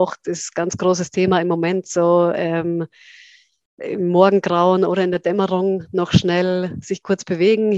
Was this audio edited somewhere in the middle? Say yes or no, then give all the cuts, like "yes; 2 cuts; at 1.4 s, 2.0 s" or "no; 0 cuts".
no; 0 cuts